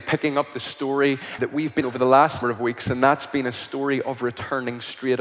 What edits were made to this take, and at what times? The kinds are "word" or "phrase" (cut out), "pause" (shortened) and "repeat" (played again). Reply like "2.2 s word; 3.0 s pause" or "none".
1.4 s word; 1.8 s word; 2.4 s word